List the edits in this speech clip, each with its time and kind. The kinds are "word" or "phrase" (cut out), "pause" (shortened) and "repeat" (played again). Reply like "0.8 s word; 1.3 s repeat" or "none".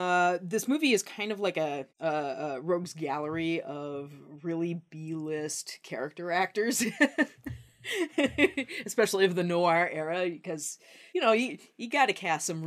1.9 s pause; 11.1 s pause